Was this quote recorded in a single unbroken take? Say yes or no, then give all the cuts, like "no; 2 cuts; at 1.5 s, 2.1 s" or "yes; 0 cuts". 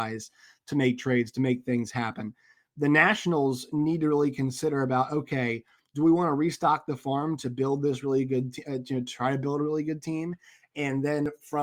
yes; 0 cuts